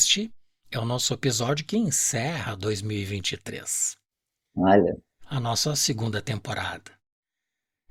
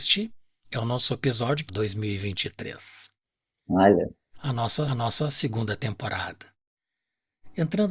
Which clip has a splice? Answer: second; 2 cuts; at 1.7 s, 4.9 s

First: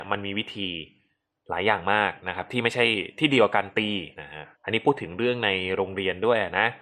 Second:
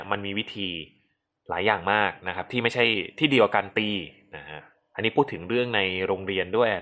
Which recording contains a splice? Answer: first; 2 cuts; at 4.1 s, 4.5 s

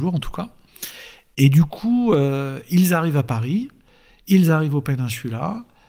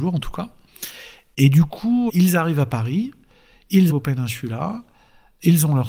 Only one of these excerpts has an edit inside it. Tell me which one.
second; 2 cuts; at 2.1 s, 3.9 s

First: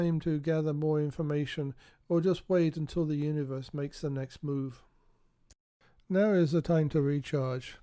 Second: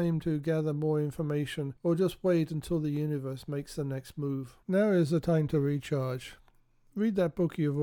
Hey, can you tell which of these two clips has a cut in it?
second; 2 cuts; at 1.8 s, 4.6 s

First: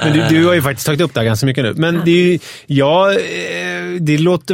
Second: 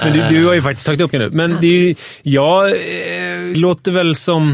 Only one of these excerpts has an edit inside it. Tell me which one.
second; 2 cuts; at 1.1 s, 3.5 s

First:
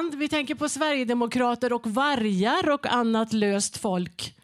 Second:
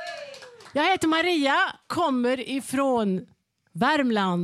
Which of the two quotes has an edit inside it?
second; 1 cut; at 1.9 s

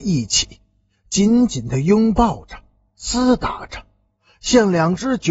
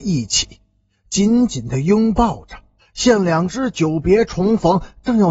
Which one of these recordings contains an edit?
second; 1 cut; at 2.8 s

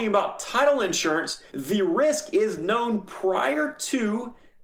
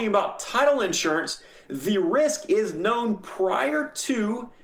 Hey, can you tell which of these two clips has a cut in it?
first; 1 cut; at 1.5 s

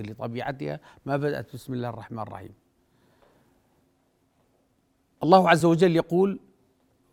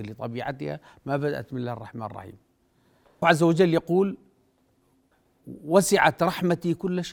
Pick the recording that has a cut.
second; 2 cuts; at 1.5 s, 3.2 s

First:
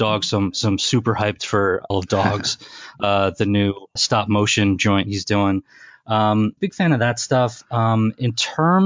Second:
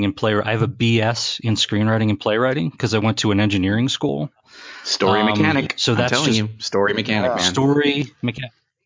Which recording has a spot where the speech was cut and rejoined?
first; 3 cuts; at 1.9 s, 4.0 s, 6.6 s

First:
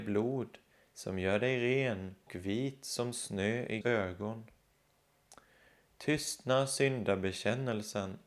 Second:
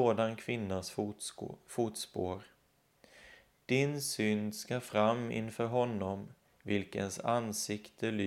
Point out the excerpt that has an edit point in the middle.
first; 2 cuts; at 2.3 s, 3.8 s

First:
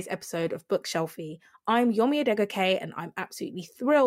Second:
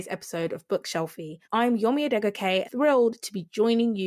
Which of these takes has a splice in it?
second; 2 cuts; at 1.4 s, 2.6 s

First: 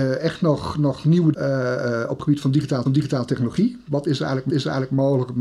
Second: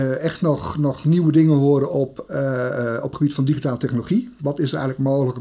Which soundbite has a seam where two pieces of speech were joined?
first; 3 cuts; at 1.3 s, 2.9 s, 4.5 s

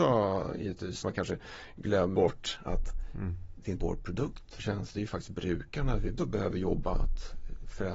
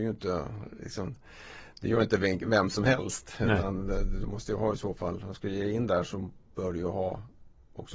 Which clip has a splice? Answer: first; 7 cuts; at 1.0 s, 2.1 s, 3.8 s, 4.6 s, 4.9 s, 6.2 s, 6.9 s

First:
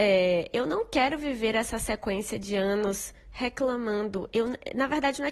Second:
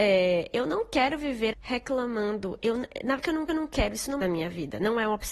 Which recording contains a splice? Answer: second; 4 cuts; at 1.5 s, 3.2 s, 3.5 s, 4.2 s

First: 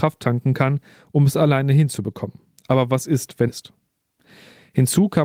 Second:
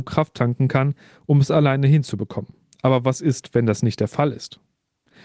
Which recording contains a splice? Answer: first; 1 cut; at 3.5 s

